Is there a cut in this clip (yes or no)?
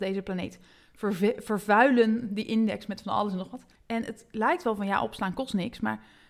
yes